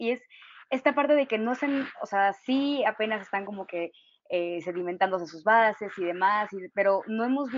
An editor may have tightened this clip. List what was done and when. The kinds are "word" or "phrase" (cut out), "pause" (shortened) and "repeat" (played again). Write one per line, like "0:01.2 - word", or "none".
none